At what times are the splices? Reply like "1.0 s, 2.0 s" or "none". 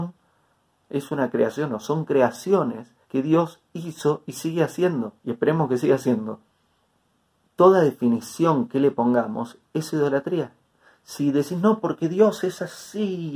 3.0 s, 5.2 s, 6.9 s